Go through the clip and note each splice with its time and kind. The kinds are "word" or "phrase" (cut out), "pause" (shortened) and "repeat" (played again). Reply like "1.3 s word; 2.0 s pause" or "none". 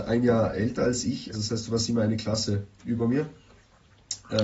1.3 s word